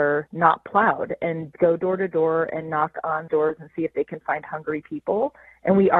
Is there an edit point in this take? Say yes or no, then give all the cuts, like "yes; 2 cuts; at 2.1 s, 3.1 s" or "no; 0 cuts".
yes; 1 cut; at 3.3 s